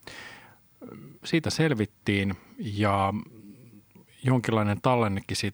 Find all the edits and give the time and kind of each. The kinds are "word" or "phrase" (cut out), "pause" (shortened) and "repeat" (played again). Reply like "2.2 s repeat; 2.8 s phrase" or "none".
1.2 s pause